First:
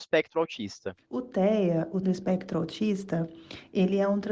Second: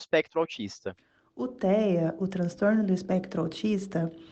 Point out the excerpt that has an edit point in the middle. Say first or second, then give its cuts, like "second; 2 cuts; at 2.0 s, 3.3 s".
first; 2 cuts; at 1.0 s, 2.0 s